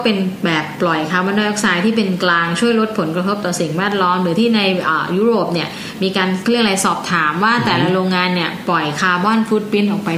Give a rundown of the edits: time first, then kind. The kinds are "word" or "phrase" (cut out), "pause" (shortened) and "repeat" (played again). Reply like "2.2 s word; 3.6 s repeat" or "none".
none